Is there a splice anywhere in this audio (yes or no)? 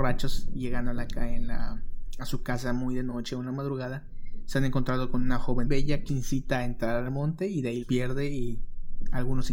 yes